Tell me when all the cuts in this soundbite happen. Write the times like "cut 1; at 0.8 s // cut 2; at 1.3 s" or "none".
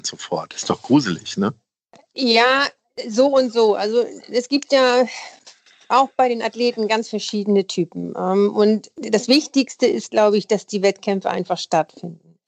none